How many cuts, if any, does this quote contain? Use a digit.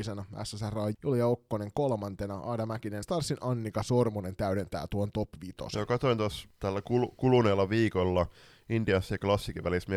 2